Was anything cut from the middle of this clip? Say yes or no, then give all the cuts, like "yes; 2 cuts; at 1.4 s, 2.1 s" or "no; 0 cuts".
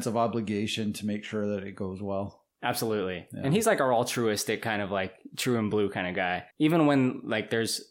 yes; 1 cut; at 6.5 s